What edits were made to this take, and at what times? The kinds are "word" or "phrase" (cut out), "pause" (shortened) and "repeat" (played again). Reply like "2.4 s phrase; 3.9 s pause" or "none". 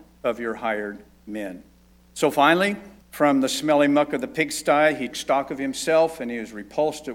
1.9 s pause; 3.0 s pause; 5.1 s word

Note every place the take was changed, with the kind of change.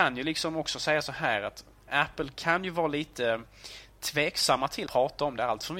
4.9 s word

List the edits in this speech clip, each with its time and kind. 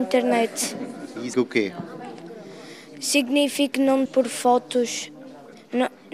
1.3 s word; 3.7 s word; 4.1 s word

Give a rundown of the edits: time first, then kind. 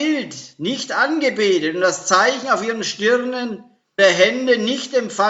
4.0 s word

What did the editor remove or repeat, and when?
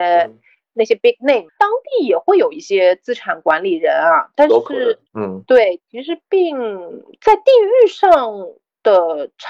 1.5 s word; 5.1 s pause

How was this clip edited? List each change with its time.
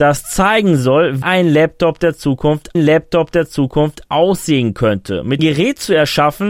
1.2 s word; 2.7 s repeat; 5.4 s phrase

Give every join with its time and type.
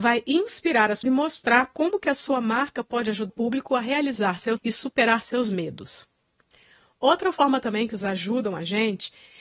1.0 s word; 3.3 s word; 4.6 s word; 8.0 s word

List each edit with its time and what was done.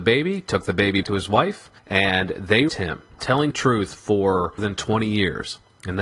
1.0 s word; 1.8 s pause; 2.7 s word; 3.2 s word; 3.5 s phrase; 4.6 s word

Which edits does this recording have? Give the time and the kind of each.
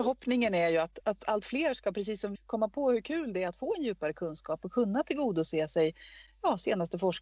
1.0 s word; 2.4 s word

